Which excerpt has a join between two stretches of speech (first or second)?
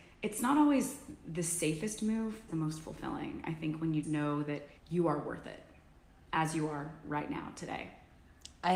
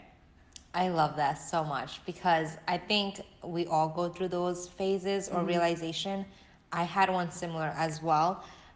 first